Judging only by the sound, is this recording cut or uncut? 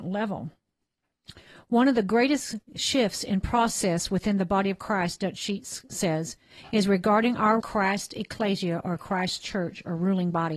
cut